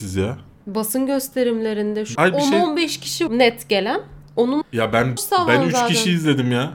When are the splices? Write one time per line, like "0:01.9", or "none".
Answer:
0:02.2
0:03.3
0:04.6
0:05.2